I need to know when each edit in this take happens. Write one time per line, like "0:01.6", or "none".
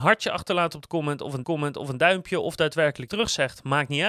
0:01.4
0:03.1

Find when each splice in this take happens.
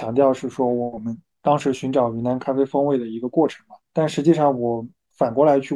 0:03.8

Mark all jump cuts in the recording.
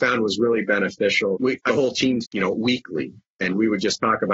0:01.3
0:01.7
0:02.2

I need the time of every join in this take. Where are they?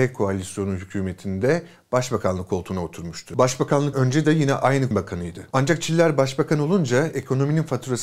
0:03.9
0:04.9

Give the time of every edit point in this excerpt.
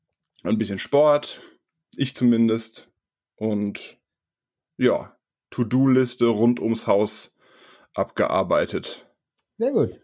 none

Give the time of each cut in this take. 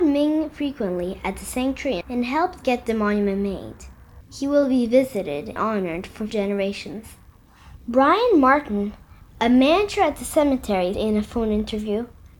0:02.0
0:05.6
0:06.3
0:10.9

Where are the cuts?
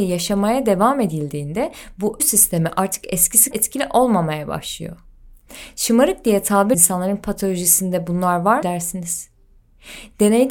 0:02.2
0:03.5
0:06.7
0:08.6

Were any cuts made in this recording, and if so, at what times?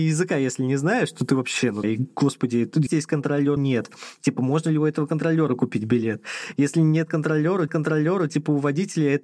0:01.8
0:02.9
0:03.6
0:07.7

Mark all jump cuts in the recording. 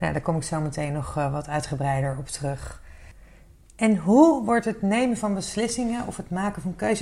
none

